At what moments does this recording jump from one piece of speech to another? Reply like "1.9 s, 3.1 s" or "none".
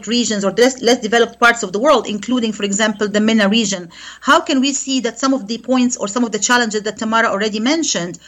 none